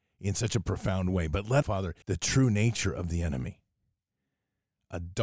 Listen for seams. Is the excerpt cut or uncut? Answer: cut